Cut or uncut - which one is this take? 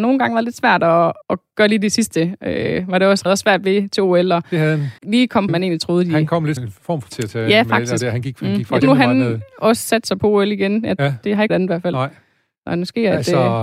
cut